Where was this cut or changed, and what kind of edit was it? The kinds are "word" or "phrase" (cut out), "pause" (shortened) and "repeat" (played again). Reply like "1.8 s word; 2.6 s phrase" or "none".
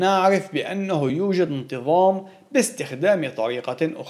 none